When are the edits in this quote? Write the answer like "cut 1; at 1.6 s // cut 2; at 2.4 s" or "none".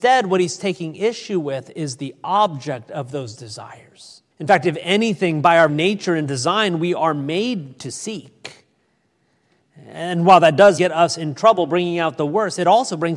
cut 1; at 4.3 s // cut 2; at 5.7 s // cut 3; at 10.8 s

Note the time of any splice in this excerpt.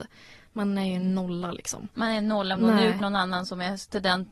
cut 1; at 2.6 s // cut 2; at 3.0 s

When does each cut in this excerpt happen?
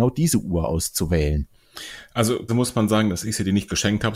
cut 1; at 2.5 s

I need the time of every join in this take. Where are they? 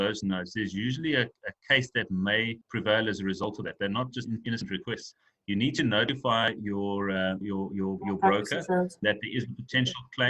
cut 1; at 2.6 s // cut 2; at 7.4 s // cut 3; at 9.0 s

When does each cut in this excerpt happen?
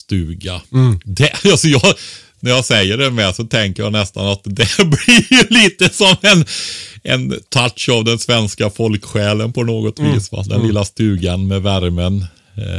none

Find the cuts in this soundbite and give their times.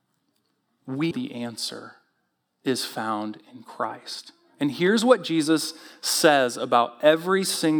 cut 1; at 1.1 s

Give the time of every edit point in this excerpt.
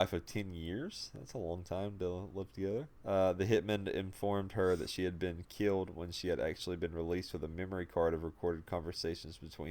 cut 1; at 2.9 s

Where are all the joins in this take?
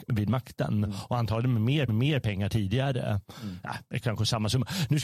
cut 1; at 1.9 s // cut 2; at 4.0 s

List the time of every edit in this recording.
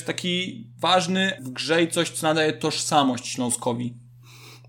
cut 1; at 1.4 s

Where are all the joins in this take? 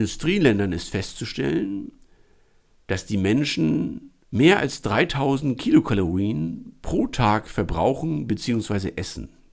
none

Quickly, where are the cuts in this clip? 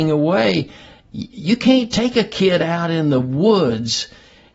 none

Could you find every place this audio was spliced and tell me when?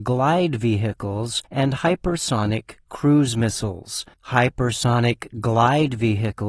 cut 1; at 1.4 s // cut 2; at 4.1 s

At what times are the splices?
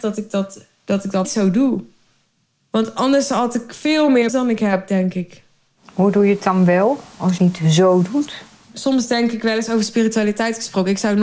cut 1; at 1.2 s // cut 2; at 4.3 s // cut 3; at 7.4 s

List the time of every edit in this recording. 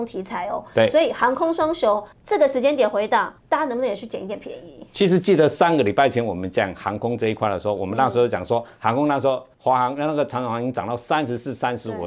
cut 1; at 2.1 s // cut 2; at 3.4 s // cut 3; at 9.5 s

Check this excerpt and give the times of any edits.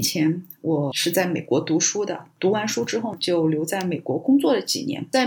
none

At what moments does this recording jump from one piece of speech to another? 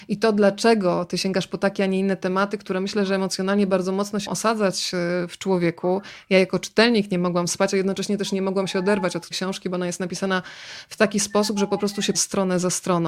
cut 1; at 4.3 s // cut 2; at 9.3 s // cut 3; at 12.1 s

